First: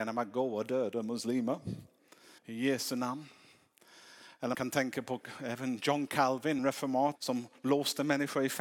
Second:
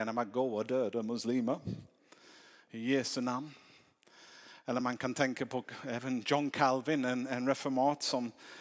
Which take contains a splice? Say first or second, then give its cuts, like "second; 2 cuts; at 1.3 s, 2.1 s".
first; 4 cuts; at 2.4 s, 4.5 s, 6.6 s, 7.2 s